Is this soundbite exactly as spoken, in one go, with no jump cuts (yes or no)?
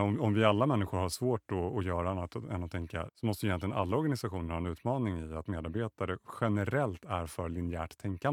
no